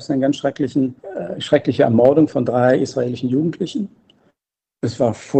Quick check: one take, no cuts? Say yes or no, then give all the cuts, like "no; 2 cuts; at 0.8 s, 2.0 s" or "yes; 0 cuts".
yes; 0 cuts